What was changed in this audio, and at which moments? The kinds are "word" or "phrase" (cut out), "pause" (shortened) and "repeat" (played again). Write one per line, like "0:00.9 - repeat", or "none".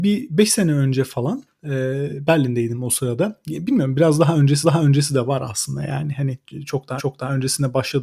0:04.6 - repeat
0:07.0 - repeat